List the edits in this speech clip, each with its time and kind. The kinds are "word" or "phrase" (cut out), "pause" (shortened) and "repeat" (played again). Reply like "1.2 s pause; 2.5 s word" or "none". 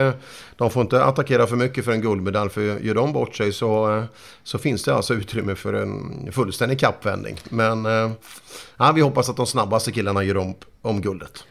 none